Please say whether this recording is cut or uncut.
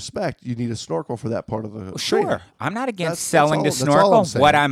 uncut